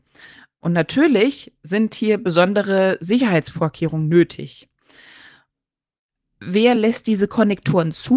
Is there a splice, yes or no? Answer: no